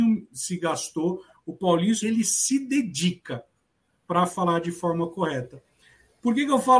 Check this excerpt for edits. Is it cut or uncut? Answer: cut